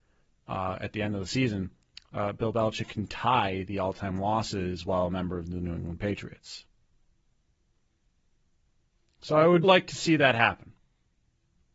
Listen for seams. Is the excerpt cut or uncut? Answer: cut